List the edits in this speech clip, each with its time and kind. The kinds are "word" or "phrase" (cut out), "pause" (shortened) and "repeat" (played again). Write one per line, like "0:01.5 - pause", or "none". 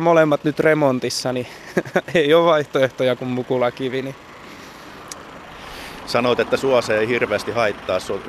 none